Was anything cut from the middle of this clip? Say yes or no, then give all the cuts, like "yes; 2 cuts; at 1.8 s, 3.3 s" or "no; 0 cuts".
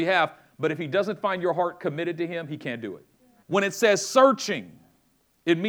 yes; 1 cut; at 3.4 s